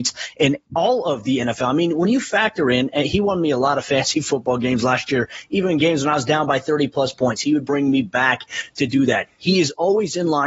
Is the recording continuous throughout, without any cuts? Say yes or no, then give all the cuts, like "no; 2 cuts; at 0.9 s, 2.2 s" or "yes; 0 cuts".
yes; 0 cuts